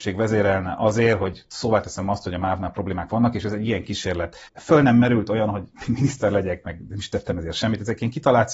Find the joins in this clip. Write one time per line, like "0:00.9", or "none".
0:04.5